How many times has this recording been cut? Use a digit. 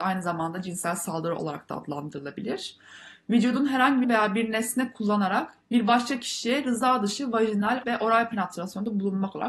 3